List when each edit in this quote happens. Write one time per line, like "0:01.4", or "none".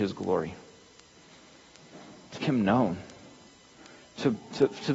0:02.4